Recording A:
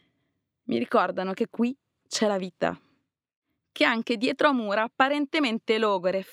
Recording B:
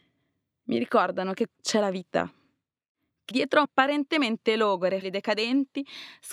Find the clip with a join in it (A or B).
B